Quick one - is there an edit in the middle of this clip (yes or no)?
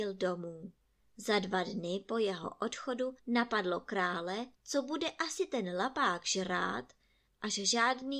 yes